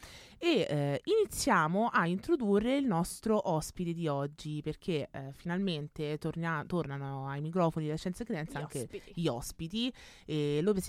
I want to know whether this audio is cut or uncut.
uncut